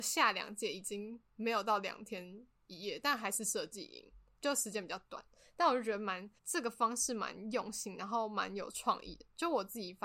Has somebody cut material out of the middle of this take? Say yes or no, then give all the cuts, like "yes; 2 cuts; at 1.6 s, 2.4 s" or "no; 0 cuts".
yes; 1 cut; at 6.4 s